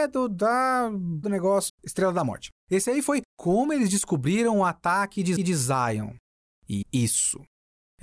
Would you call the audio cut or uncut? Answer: cut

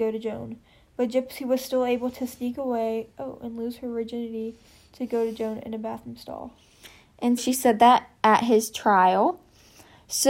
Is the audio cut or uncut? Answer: cut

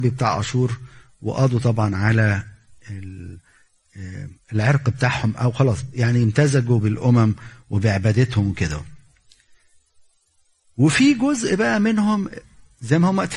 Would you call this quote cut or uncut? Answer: uncut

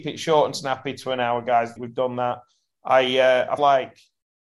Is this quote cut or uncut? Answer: cut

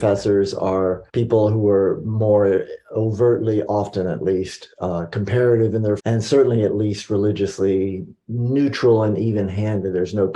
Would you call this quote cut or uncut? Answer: cut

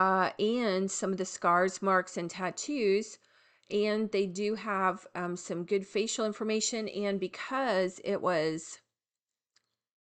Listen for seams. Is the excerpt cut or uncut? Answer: uncut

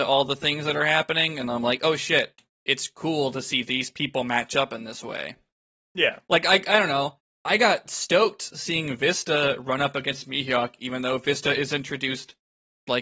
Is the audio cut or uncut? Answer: uncut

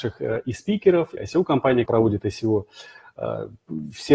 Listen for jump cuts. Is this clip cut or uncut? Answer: cut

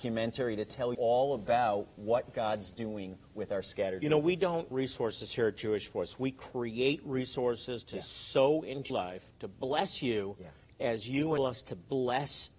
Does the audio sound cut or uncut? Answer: cut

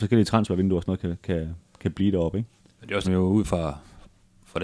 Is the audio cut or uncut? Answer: cut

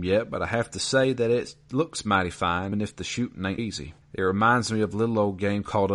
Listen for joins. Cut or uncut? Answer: cut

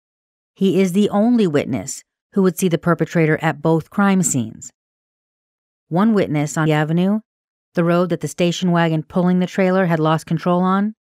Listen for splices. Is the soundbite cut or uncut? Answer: cut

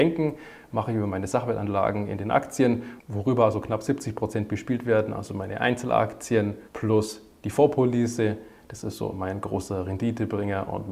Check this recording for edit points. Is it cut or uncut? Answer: cut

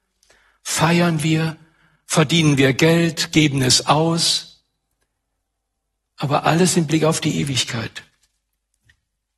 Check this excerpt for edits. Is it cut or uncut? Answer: uncut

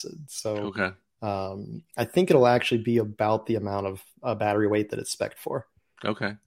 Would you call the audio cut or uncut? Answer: uncut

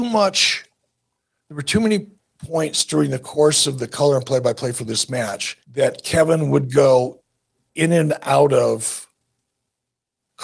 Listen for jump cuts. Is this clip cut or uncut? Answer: cut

